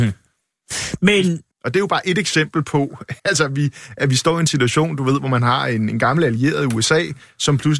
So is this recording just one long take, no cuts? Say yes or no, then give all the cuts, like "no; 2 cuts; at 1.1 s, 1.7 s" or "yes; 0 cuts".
no; 2 cuts; at 1.5 s, 3.2 s